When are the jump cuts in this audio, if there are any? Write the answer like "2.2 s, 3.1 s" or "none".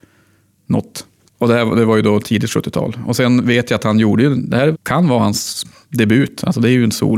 4.7 s